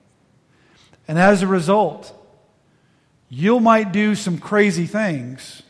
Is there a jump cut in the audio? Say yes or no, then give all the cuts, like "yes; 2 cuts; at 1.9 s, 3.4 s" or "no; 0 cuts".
no; 0 cuts